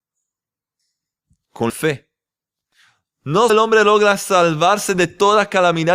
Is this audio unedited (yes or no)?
no